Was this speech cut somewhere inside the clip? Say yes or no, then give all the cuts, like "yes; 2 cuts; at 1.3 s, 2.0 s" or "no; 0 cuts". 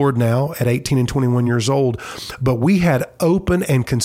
no; 0 cuts